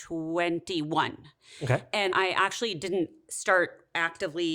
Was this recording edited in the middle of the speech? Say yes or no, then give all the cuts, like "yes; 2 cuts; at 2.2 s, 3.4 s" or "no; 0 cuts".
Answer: yes; 1 cut; at 2.1 s